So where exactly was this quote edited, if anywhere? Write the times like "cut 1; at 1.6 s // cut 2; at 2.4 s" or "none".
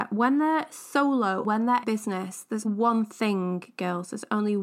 cut 1; at 1.4 s // cut 2; at 1.8 s // cut 3; at 2.6 s